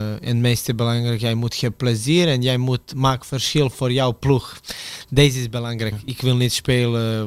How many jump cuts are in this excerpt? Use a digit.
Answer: 0